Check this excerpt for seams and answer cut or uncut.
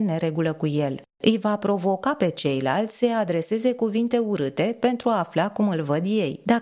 uncut